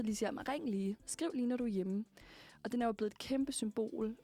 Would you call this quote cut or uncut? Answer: uncut